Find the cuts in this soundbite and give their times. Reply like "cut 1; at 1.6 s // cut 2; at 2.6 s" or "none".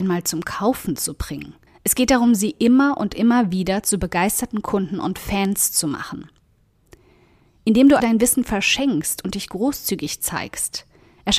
cut 1; at 1.7 s // cut 2; at 8.0 s